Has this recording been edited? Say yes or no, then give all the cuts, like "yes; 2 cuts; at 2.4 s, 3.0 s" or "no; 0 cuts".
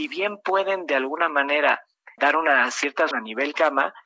yes; 2 cuts; at 2.2 s, 3.1 s